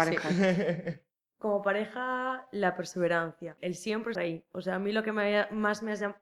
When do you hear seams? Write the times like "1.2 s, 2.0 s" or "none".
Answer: 1.1 s, 3.6 s, 4.2 s